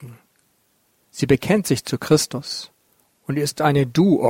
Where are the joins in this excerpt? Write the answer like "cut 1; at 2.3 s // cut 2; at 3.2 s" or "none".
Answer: none